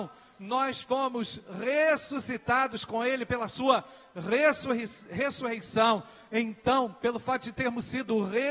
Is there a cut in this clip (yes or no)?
no